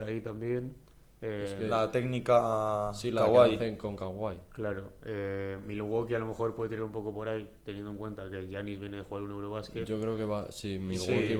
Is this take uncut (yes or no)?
yes